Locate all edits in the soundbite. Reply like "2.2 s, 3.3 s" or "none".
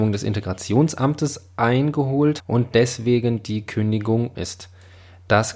2.4 s, 4.3 s